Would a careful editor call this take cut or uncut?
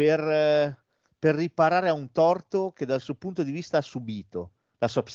uncut